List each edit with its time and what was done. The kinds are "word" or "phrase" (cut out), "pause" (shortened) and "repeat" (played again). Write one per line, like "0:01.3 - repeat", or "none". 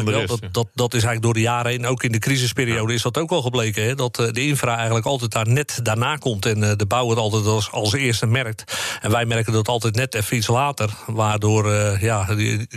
none